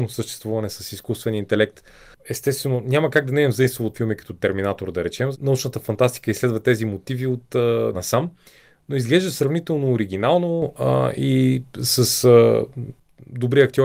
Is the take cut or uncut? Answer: cut